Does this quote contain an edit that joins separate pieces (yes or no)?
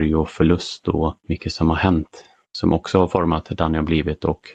yes